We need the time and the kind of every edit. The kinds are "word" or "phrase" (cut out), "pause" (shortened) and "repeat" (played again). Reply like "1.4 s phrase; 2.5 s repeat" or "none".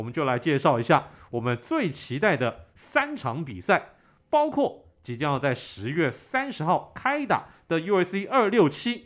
none